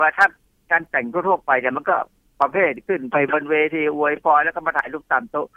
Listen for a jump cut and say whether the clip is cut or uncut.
uncut